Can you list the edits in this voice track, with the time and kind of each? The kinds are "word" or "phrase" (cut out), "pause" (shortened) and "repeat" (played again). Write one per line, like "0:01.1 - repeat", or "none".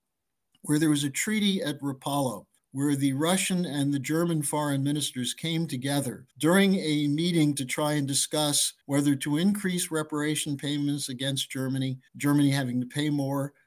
0:02.6 - pause
0:06.3 - pause
0:08.8 - pause
0:12.1 - pause